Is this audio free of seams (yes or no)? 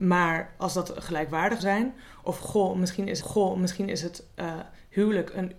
no